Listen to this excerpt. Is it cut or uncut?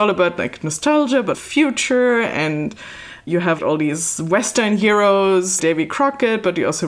cut